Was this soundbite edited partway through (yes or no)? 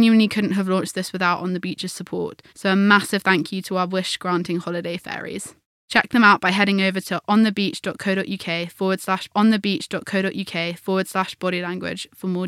yes